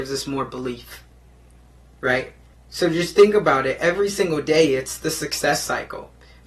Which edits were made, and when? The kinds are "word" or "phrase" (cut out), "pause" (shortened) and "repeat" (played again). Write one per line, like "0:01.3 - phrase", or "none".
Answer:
0:02.5 - pause